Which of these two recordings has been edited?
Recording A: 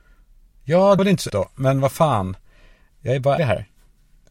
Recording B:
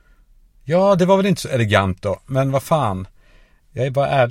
A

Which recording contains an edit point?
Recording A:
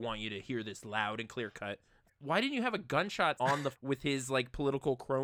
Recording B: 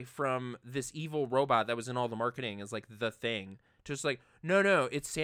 A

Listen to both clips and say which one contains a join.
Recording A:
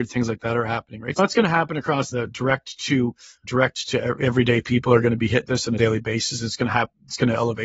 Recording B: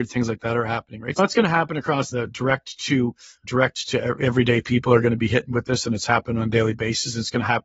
A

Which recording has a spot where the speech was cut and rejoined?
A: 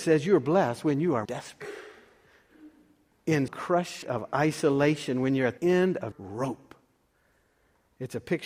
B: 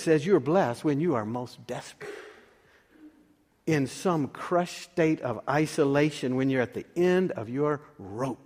A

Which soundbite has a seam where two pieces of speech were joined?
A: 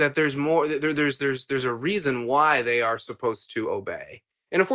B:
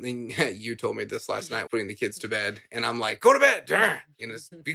B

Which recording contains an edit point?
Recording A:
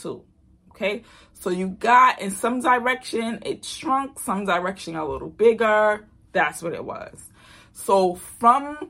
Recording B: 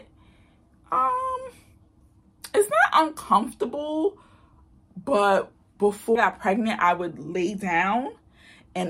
B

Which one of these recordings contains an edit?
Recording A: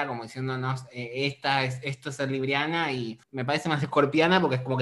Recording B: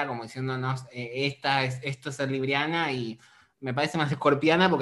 A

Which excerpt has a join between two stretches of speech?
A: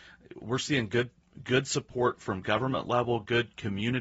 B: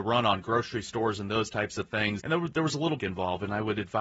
B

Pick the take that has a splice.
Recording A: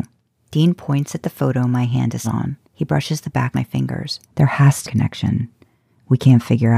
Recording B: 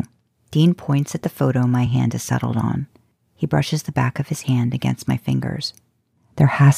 A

